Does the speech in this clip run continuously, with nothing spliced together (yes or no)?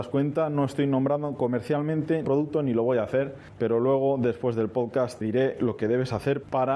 no